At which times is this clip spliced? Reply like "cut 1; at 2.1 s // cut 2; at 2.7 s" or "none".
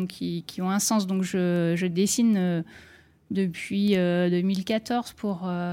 none